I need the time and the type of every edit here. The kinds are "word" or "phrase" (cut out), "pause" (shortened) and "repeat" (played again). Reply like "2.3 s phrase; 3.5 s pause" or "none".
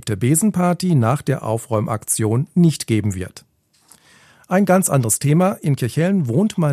none